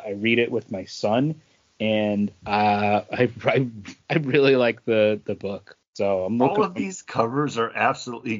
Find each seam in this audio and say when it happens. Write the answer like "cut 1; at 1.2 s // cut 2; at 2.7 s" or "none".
none